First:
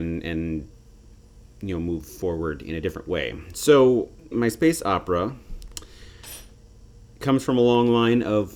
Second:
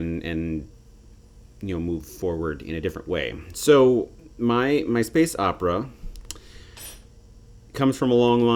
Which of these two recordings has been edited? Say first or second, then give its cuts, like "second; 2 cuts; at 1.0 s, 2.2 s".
first; 1 cut; at 4.3 s